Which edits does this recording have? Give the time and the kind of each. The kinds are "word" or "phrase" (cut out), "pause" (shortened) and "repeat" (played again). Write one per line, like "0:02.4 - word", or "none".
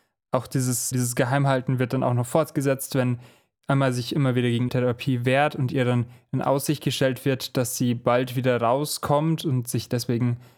0:00.9 - word
0:04.7 - word